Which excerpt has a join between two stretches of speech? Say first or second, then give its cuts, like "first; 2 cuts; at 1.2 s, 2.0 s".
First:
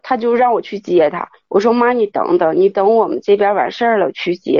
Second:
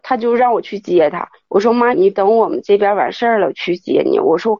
second; 1 cut; at 1.9 s